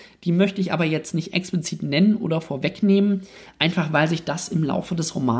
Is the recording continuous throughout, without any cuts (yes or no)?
yes